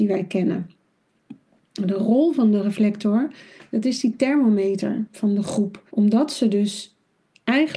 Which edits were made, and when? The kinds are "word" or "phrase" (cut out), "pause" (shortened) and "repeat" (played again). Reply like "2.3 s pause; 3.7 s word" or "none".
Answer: 5.9 s pause